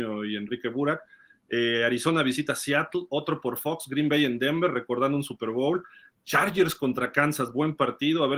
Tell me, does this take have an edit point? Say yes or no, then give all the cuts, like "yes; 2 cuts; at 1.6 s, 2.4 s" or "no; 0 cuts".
no; 0 cuts